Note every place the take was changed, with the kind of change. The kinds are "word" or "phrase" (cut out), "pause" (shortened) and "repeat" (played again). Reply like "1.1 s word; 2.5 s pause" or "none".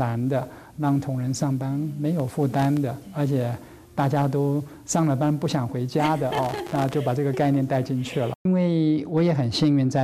none